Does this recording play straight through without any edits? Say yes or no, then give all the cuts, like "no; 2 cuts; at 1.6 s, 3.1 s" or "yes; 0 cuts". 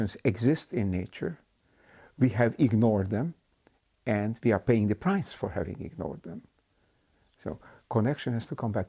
yes; 0 cuts